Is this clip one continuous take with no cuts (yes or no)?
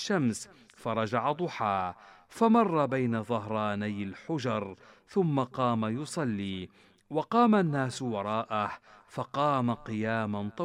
yes